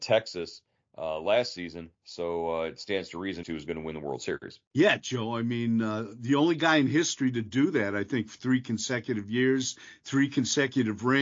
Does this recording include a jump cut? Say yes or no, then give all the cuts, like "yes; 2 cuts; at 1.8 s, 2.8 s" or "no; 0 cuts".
yes; 3 cuts; at 1.9 s, 3.4 s, 4.7 s